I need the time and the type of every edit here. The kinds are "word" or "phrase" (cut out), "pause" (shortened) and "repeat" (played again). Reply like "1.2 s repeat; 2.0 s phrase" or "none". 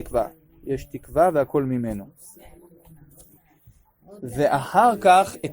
none